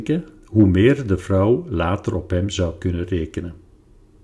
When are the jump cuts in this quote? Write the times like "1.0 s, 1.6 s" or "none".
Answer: none